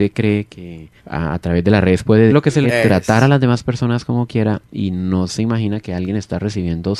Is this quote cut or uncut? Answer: cut